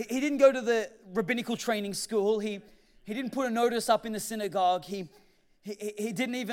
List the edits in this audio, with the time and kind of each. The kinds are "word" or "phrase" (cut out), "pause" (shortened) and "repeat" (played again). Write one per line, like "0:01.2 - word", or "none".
none